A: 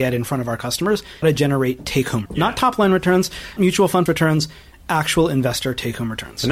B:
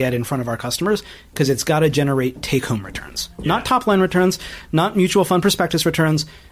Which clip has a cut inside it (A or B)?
A